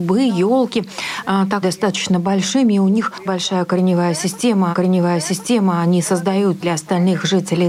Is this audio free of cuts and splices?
no; 4 cuts; at 1.6 s, 3.3 s, 4.7 s, 6.6 s

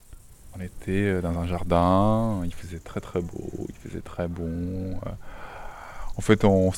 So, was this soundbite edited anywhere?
no; 0 cuts

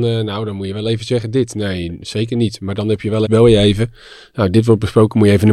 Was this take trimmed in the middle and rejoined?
yes; 1 cut; at 3.3 s

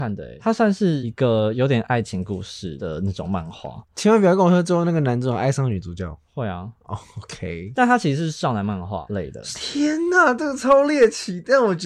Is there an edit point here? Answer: no; 0 cuts

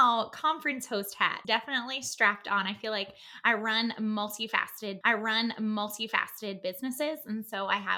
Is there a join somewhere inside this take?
yes; 2 cuts; at 1.4 s, 5.0 s

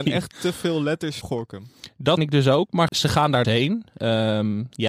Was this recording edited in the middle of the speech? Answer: yes; 4 cuts; at 1.2 s, 2.2 s, 2.9 s, 3.4 s

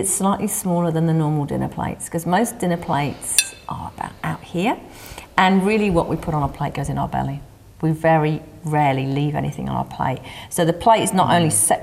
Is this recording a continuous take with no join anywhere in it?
yes; 0 cuts

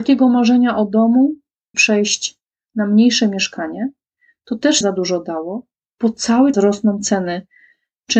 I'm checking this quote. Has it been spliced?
yes; 3 cuts; at 1.7 s, 4.8 s, 6.5 s

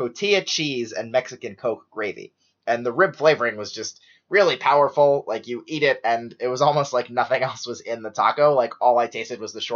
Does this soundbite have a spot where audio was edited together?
no; 0 cuts

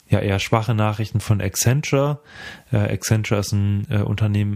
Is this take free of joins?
yes; 0 cuts

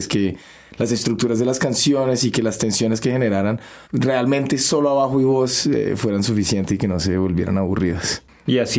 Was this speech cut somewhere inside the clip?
yes; 1 cut; at 3.8 s

